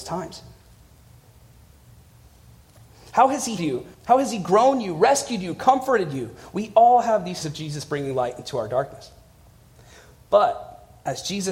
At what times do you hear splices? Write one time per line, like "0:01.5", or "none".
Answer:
0:03.6
0:03.9
0:07.4